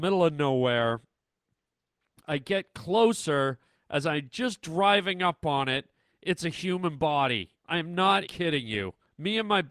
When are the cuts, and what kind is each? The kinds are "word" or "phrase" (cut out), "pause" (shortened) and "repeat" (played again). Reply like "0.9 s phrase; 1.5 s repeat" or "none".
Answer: 7.6 s pause; 8.3 s word